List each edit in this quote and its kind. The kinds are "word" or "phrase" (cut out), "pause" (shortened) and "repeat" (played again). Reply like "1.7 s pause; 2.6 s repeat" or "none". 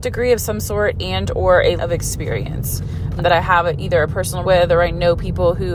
1.8 s word; 3.2 s word; 4.4 s word